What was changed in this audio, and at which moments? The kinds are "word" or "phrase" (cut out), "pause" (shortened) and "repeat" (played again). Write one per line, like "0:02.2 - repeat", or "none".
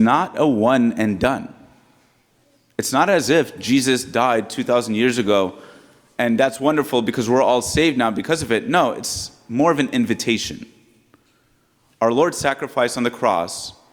none